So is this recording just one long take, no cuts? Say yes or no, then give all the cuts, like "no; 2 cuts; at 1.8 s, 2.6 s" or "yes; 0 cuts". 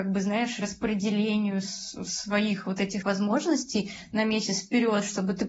no; 1 cut; at 3.0 s